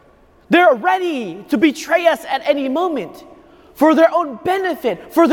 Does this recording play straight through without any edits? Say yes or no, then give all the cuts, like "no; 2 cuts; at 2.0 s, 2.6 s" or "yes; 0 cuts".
yes; 0 cuts